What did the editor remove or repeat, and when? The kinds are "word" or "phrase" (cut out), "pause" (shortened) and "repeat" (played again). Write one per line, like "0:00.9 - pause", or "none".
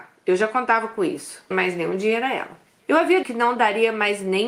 0:01.5 - phrase
0:02.8 - pause
0:03.2 - word